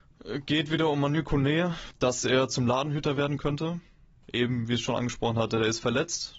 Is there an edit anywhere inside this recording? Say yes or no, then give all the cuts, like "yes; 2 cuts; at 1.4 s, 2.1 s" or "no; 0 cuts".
no; 0 cuts